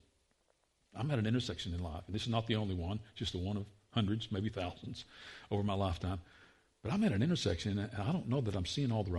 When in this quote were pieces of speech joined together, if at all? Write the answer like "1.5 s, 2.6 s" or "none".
none

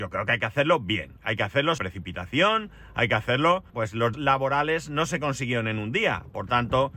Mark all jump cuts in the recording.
1.8 s, 3.7 s, 4.1 s

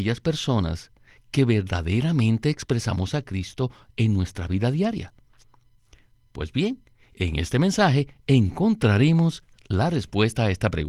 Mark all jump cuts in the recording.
none

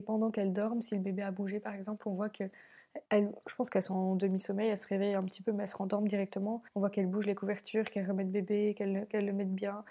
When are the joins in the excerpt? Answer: 3.1 s, 6.7 s

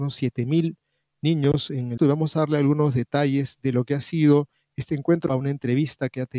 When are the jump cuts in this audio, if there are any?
2.0 s, 5.3 s

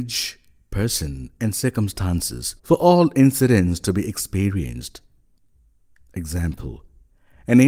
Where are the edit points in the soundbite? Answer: 2.6 s

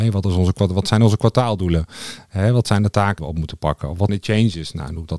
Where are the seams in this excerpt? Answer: 3.2 s, 4.1 s

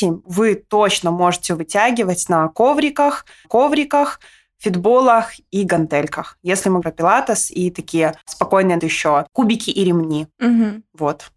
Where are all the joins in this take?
3.4 s, 6.8 s, 8.8 s, 10.3 s

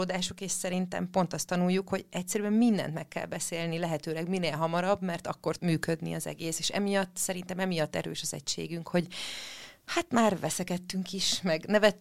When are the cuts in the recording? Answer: 5.6 s

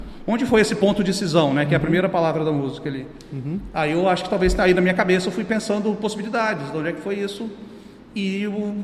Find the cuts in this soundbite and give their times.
none

